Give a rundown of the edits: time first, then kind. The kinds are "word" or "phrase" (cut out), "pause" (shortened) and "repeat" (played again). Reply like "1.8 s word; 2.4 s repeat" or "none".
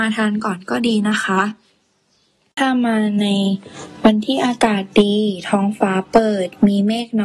none